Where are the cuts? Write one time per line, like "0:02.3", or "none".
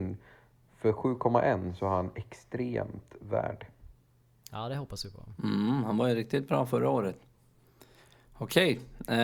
none